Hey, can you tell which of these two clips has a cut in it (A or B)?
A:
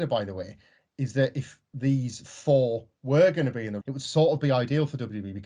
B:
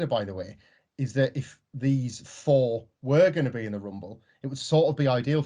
A